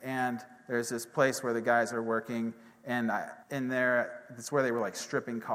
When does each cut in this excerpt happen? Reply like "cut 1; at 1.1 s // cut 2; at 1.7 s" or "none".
cut 1; at 3.4 s